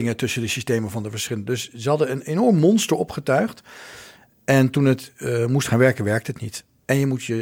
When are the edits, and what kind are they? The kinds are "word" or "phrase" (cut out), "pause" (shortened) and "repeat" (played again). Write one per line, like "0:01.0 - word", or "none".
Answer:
none